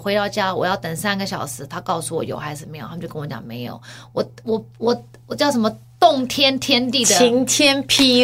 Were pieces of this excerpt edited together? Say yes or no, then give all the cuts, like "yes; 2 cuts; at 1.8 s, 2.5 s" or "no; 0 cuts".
no; 0 cuts